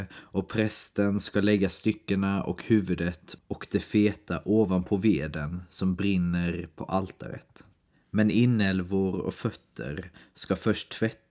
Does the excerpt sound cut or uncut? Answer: uncut